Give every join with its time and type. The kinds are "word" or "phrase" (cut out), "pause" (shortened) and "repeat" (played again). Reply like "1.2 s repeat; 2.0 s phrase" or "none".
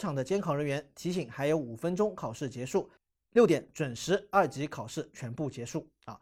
3.0 s pause